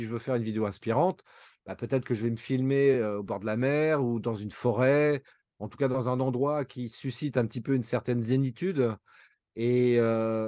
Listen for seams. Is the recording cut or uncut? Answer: uncut